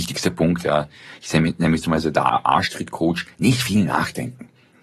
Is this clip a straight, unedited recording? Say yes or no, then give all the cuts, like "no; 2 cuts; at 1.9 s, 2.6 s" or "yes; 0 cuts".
yes; 0 cuts